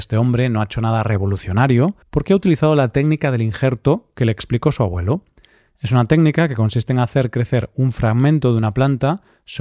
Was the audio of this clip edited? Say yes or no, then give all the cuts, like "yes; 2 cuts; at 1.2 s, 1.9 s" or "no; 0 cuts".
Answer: yes; 1 cut; at 2.0 s